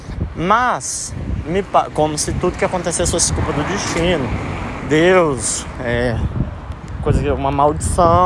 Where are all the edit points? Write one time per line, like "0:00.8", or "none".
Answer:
0:07.0